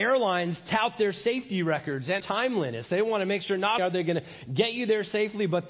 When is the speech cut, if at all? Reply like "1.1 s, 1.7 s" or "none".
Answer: 2.2 s, 3.8 s